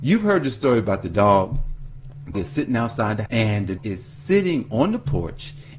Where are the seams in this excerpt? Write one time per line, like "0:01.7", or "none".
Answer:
0:02.3
0:03.3
0:03.8